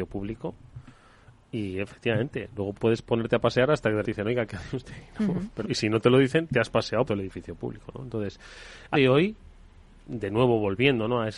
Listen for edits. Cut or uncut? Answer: cut